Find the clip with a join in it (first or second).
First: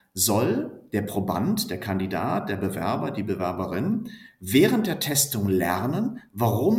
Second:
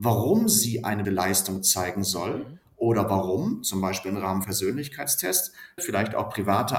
second